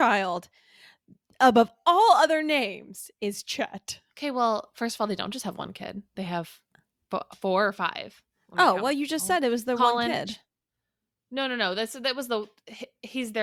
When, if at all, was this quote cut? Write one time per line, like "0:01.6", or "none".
0:04.1
0:06.1